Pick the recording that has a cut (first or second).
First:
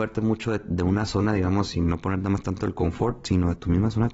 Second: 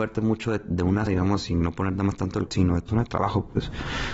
second